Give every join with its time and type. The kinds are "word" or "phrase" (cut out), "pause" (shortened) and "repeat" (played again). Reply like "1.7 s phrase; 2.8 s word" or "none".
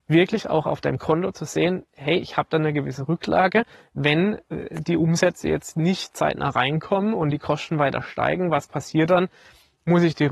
none